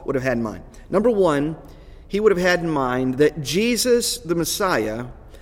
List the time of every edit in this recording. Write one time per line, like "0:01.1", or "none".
none